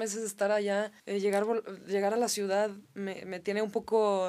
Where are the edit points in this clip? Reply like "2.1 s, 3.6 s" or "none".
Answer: 1.0 s, 2.9 s